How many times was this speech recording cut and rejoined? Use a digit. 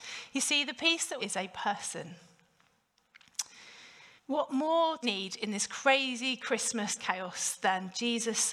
4